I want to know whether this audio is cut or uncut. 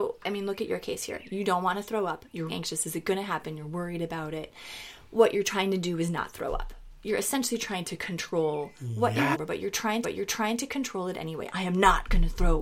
cut